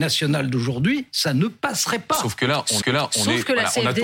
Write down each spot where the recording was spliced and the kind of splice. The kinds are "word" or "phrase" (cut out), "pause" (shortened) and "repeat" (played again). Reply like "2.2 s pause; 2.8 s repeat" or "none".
2.8 s repeat